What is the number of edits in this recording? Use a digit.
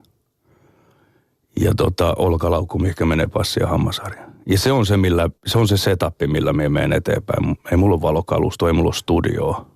1